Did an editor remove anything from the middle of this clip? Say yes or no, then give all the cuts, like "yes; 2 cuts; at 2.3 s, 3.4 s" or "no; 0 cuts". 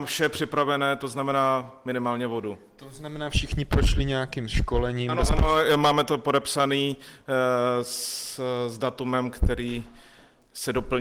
no; 0 cuts